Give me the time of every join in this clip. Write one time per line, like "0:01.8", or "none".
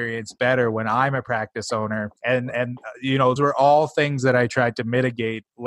0:02.2
0:03.4